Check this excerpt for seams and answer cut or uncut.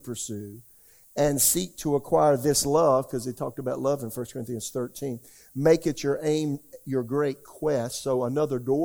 uncut